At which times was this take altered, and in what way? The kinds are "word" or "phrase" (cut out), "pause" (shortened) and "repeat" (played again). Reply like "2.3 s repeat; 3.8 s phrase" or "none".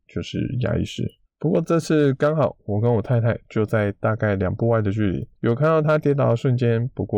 1.3 s pause; 5.4 s pause